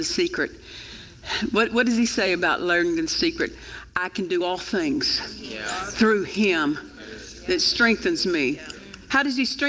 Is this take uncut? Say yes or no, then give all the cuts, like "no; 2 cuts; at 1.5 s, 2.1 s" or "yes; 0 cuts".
yes; 0 cuts